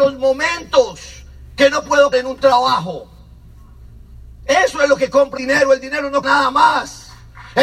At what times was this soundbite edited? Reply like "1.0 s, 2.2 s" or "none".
2.1 s, 5.4 s, 6.2 s